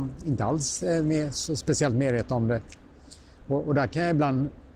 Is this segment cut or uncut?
uncut